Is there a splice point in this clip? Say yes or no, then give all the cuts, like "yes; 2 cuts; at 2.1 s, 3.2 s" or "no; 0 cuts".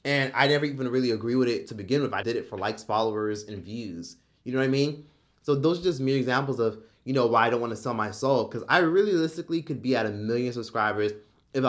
yes; 1 cut; at 2.2 s